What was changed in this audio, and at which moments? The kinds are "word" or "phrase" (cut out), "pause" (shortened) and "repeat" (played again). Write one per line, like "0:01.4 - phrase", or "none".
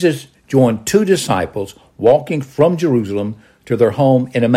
none

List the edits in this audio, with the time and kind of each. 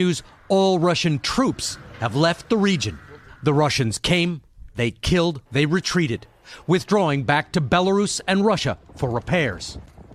0:05.5 - pause

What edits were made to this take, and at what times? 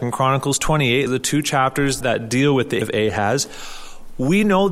0:01.1 - word
0:02.0 - word
0:02.8 - word

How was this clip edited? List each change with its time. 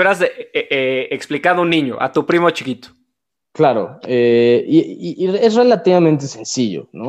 none

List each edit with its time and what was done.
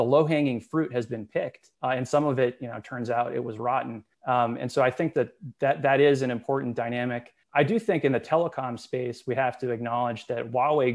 0:01.7 - pause
0:04.1 - pause
0:07.4 - pause

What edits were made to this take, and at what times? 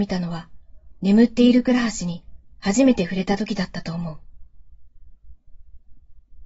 0:01.0 - phrase

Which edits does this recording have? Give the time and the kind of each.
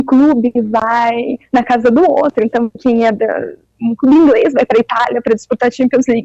none

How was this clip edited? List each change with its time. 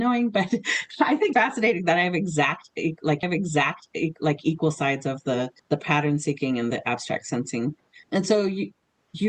0:01.3 - word
0:03.2 - repeat
0:05.6 - pause
0:06.7 - phrase
0:08.0 - word

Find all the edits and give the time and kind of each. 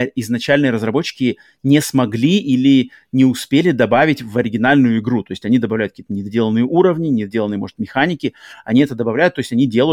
none

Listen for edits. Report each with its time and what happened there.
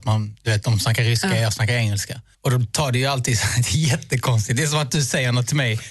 0:02.3 - pause

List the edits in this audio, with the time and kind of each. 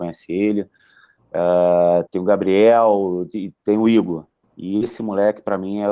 0:02.1 - word
0:03.6 - pause
0:04.4 - pause

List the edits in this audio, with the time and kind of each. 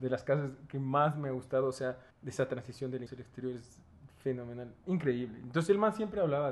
0:02.1 - pause
0:03.1 - word

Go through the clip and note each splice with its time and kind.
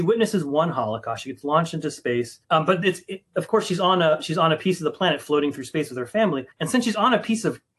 0:02.4 - pause
0:06.5 - pause

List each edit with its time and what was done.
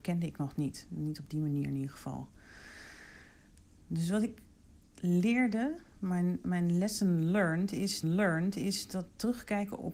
0:08.0 - repeat

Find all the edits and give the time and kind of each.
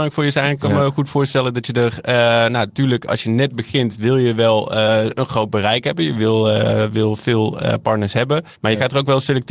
0:08.6 - pause

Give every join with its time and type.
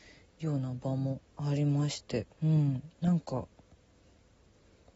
0:01.3 - pause
0:02.3 - pause
0:02.9 - pause

